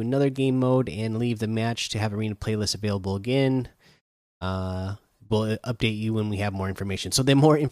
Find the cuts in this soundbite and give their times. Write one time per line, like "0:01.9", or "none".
none